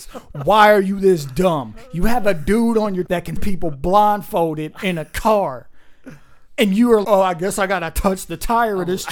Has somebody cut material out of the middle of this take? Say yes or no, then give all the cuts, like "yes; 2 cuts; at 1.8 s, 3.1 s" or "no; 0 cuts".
yes; 3 cuts; at 3.1 s, 3.4 s, 7.0 s